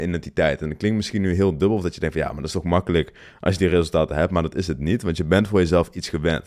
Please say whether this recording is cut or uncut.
uncut